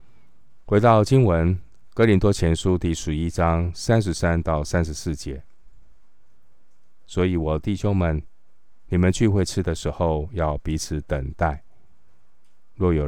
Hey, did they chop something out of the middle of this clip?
no; 0 cuts

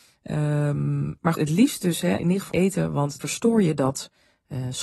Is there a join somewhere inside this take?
yes; 4 cuts; at 1.3 s, 2.2 s, 2.5 s, 3.2 s

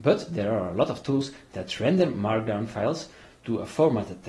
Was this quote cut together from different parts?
no; 0 cuts

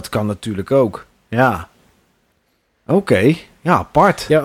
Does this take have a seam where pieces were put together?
no; 0 cuts

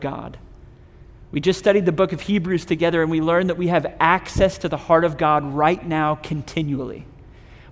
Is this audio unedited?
yes; 0 cuts

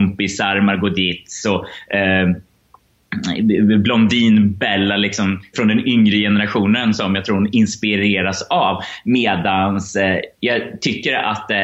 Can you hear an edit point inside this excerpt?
yes; 2 cuts; at 5.5 s, 10.3 s

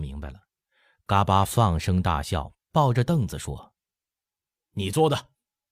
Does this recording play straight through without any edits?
no; 1 cut; at 3.8 s

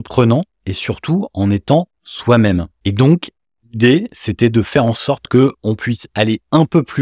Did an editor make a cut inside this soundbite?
no; 0 cuts

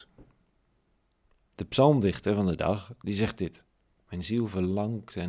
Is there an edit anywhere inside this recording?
no; 0 cuts

